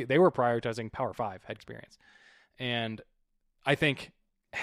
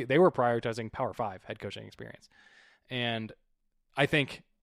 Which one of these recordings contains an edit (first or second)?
first